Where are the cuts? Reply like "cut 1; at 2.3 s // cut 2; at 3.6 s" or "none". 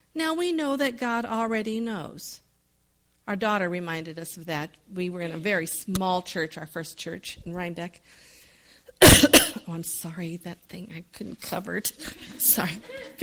none